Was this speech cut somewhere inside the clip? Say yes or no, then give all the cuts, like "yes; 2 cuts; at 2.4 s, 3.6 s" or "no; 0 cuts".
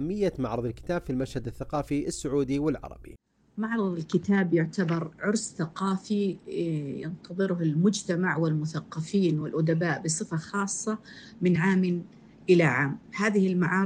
no; 0 cuts